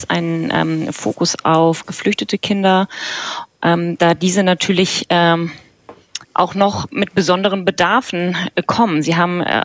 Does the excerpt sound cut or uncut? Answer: cut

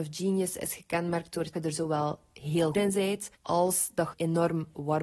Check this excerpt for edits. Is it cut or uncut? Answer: cut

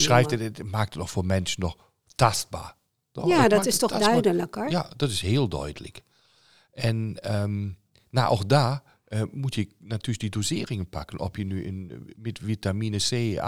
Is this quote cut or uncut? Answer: uncut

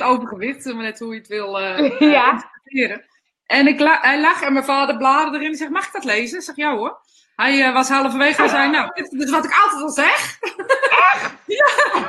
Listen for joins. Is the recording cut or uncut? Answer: uncut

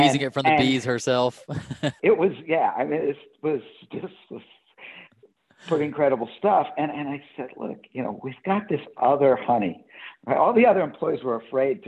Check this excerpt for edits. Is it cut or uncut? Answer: cut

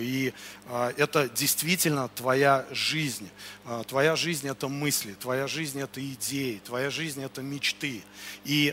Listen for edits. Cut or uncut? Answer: uncut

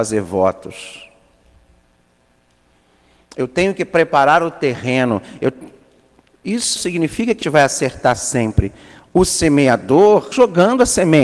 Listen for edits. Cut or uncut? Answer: cut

